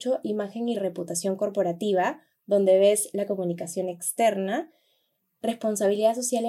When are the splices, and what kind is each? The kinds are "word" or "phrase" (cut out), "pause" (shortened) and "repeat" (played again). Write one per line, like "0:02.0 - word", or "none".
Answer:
none